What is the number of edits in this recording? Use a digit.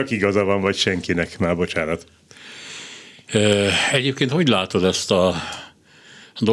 0